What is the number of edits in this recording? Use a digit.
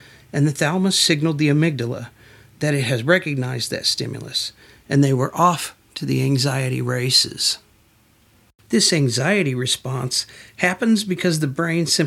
0